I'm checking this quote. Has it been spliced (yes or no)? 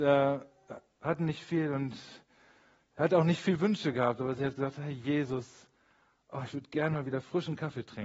no